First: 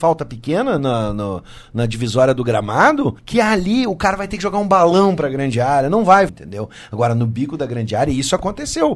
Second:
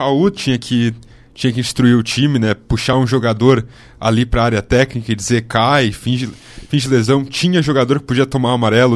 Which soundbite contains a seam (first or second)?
first